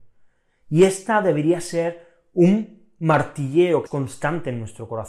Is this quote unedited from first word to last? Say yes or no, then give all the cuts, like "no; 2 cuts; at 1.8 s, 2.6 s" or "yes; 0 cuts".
no; 1 cut; at 3.9 s